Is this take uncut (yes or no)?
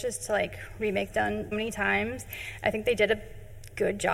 no